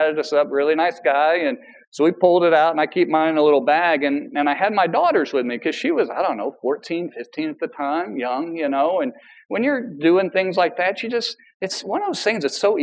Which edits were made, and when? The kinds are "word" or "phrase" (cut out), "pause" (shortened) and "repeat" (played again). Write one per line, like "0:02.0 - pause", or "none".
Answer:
none